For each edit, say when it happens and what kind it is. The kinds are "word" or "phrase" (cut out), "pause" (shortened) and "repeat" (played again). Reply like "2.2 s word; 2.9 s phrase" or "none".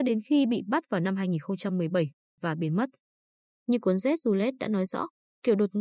none